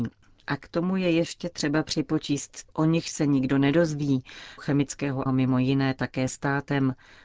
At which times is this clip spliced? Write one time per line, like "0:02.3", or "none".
0:02.7
0:04.6
0:05.3